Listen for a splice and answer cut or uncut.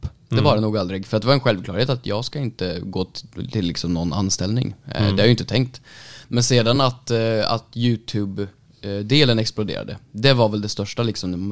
uncut